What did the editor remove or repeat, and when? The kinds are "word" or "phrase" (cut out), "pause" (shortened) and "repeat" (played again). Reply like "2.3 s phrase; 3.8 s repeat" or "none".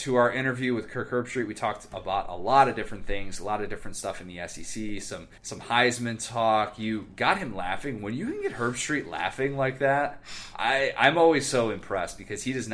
5.4 s pause